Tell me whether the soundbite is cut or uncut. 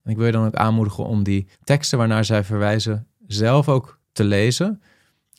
cut